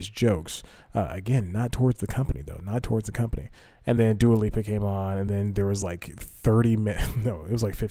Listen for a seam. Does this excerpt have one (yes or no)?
no